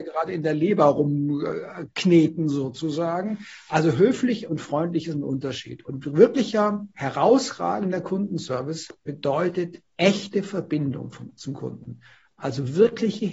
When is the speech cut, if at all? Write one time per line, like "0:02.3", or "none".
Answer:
none

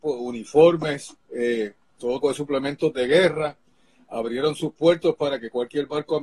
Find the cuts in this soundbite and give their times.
0:02.2

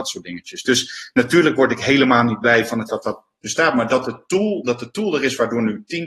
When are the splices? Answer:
0:02.9

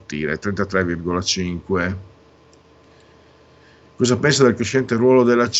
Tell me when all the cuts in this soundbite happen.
none

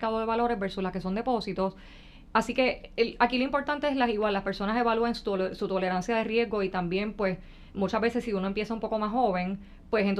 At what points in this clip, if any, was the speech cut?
none

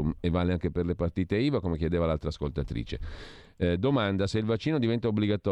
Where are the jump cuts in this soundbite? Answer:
none

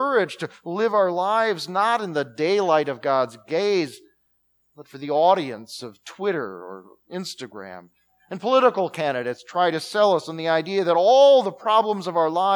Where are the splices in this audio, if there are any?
none

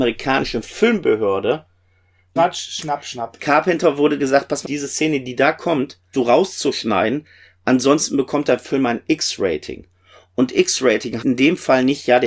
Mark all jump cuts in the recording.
0:02.4
0:04.2
0:04.6
0:06.1
0:11.2

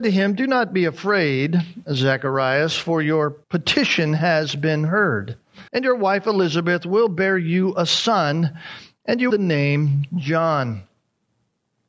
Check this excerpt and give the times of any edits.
0:03.4
0:05.7
0:09.3

